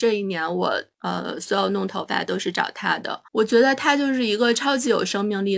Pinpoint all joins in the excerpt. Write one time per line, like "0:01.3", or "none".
0:03.3